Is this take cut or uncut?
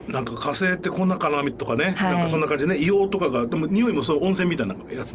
uncut